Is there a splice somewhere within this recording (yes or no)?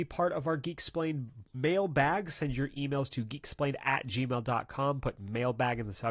yes